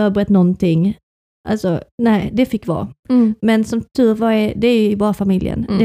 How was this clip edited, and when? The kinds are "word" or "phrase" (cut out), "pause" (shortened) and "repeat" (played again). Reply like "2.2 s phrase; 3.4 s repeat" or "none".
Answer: 1.9 s pause